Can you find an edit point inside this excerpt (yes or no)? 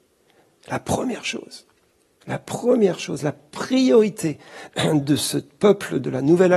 no